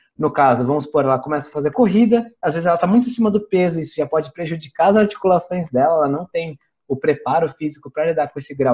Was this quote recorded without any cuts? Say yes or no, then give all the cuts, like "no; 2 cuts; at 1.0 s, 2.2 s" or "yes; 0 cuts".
yes; 0 cuts